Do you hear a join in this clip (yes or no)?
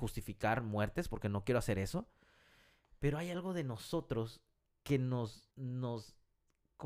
yes